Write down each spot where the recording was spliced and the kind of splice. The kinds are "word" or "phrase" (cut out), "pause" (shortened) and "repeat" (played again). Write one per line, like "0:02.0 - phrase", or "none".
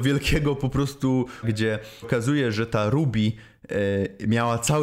0:01.4 - word
0:02.0 - word